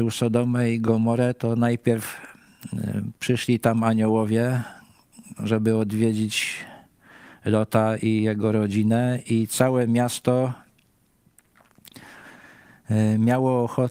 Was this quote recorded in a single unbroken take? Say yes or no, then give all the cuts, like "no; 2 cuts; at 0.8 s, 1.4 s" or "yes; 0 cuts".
yes; 0 cuts